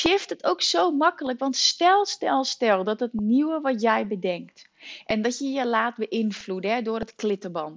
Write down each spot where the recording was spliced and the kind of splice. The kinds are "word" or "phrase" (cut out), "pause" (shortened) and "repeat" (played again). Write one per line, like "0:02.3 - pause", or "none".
none